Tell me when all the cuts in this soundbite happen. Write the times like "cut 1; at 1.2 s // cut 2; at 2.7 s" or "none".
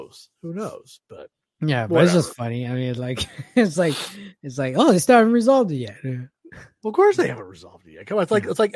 none